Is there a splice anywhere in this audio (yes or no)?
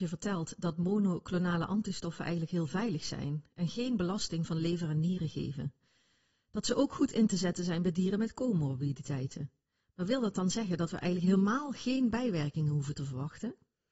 no